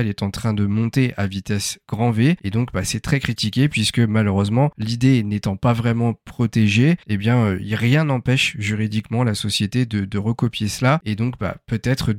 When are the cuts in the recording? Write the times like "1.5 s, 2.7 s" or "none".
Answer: 7.0 s